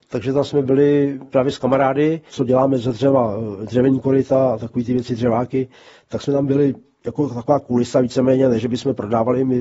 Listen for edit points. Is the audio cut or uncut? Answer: uncut